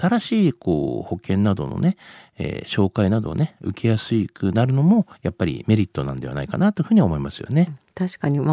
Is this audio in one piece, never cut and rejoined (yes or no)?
yes